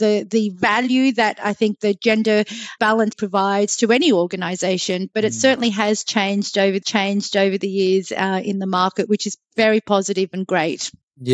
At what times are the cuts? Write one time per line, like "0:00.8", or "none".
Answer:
0:02.8
0:03.1
0:06.8